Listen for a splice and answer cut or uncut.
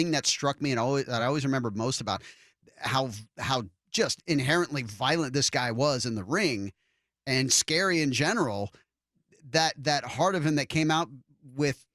uncut